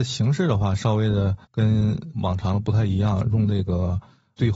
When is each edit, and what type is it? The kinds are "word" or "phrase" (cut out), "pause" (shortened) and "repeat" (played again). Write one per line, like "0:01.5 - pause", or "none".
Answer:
0:01.4 - pause